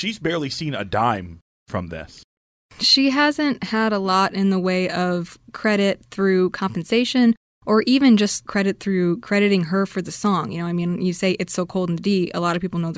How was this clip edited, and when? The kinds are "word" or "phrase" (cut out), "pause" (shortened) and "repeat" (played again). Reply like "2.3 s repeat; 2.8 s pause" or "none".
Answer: none